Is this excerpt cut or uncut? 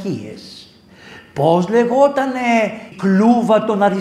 cut